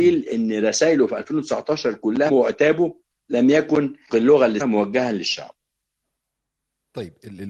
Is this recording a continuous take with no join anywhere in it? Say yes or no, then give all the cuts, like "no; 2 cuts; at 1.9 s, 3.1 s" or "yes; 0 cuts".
no; 3 cuts; at 2.3 s, 4.1 s, 4.6 s